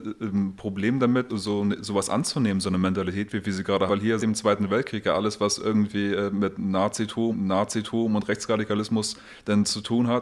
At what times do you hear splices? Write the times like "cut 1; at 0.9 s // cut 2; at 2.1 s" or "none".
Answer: cut 1; at 1.3 s // cut 2; at 3.9 s // cut 3; at 4.2 s // cut 4; at 7.3 s